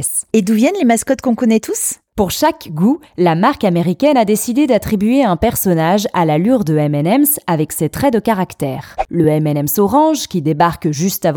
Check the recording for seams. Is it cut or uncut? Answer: uncut